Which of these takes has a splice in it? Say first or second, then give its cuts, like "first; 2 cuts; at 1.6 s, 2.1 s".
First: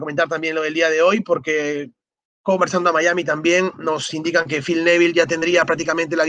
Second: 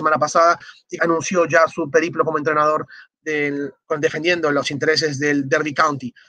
second; 2 cuts; at 1.0 s, 3.1 s